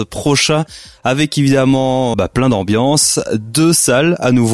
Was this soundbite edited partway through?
yes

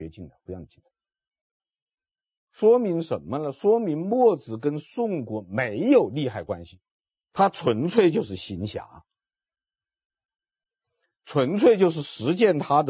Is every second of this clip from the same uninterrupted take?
no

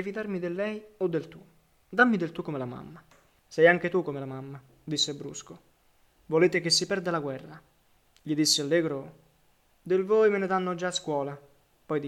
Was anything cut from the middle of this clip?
no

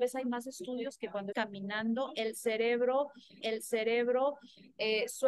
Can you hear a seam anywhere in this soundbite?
yes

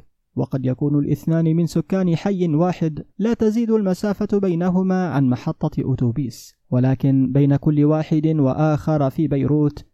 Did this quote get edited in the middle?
yes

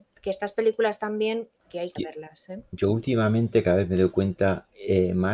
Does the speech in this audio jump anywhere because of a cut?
yes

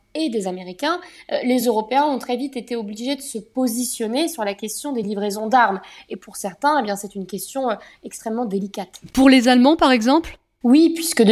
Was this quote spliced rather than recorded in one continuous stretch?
no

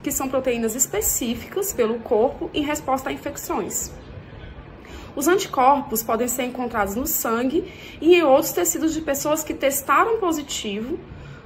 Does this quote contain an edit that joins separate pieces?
yes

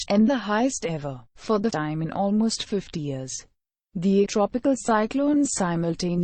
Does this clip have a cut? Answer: yes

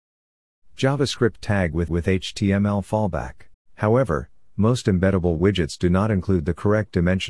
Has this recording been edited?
yes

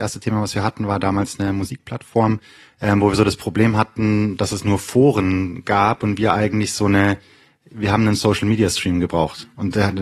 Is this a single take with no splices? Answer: yes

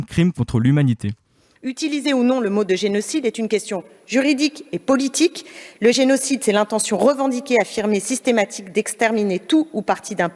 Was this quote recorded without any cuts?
yes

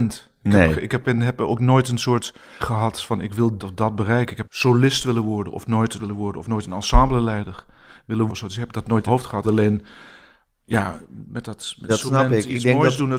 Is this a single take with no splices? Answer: no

